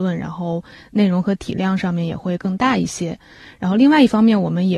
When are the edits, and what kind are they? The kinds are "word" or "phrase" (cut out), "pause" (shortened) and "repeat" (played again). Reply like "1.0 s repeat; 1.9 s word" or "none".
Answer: none